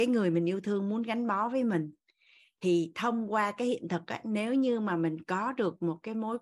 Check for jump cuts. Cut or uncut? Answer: uncut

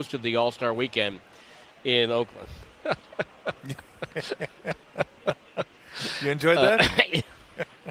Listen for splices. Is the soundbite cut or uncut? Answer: uncut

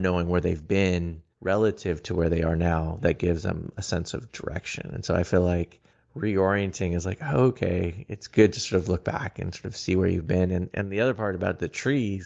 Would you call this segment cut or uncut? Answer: cut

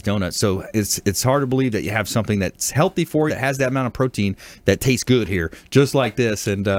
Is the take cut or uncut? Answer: cut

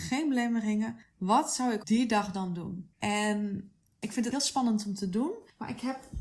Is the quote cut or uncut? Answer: cut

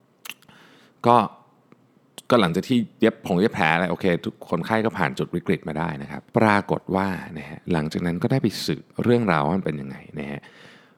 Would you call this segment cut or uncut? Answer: cut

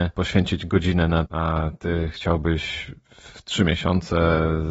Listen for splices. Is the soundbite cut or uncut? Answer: cut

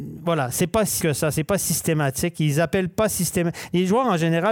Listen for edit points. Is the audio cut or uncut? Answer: cut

